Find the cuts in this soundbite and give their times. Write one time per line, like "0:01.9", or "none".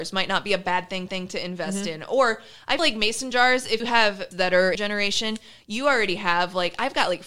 0:01.1
0:02.8
0:03.8
0:04.3
0:04.7